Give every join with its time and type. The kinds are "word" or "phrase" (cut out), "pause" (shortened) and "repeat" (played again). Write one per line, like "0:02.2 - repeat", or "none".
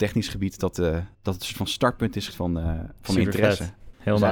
0:01.1 - pause
0:02.3 - word

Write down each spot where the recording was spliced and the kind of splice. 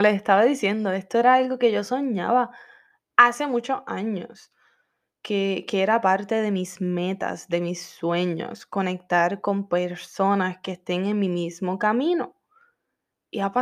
none

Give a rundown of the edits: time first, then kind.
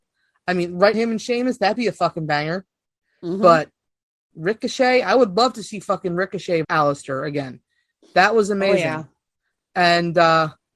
0:00.9 - word
0:04.3 - word
0:06.6 - word

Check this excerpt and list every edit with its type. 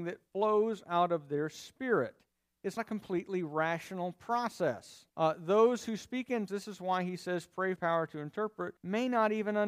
0:02.8 - word
0:05.1 - pause
0:06.5 - word
0:07.8 - phrase
0:08.8 - pause

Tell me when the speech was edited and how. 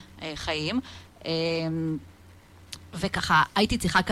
none

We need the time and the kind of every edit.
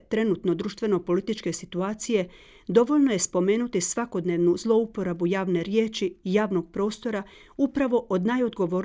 none

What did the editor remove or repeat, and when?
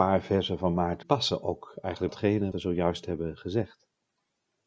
0:01.0 - phrase
0:02.1 - word
0:02.5 - word

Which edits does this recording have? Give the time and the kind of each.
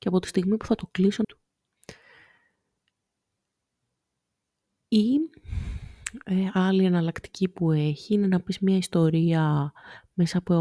0:01.2 - phrase

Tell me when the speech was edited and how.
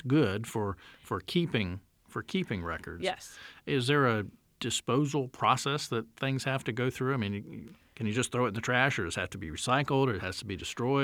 none

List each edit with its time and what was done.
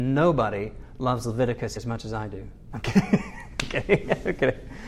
0:01.8 - word

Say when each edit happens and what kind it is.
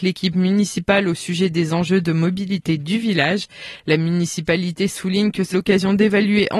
0:05.5 - word

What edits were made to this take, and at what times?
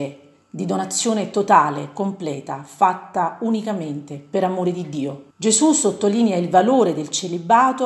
0:05.3 - pause

